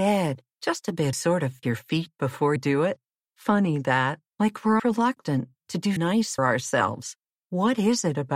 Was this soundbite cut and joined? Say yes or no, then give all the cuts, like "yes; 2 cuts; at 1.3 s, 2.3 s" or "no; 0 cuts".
yes; 8 cuts; at 1.1 s, 1.6 s, 2.6 s, 3.2 s, 4.3 s, 4.8 s, 6.0 s, 6.4 s